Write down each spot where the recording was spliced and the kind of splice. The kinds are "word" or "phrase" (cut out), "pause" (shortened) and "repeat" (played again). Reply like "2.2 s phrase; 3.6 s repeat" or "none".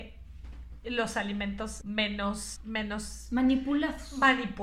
1.8 s word; 2.6 s word